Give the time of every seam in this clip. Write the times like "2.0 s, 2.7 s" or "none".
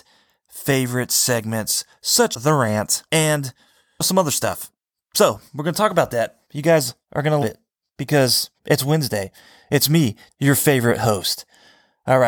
2.3 s, 3.1 s, 5.5 s, 6.4 s, 7.0 s, 7.4 s, 8.6 s, 10.3 s